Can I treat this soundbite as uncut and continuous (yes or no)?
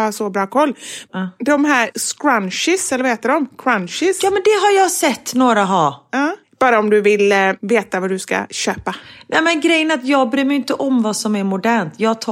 yes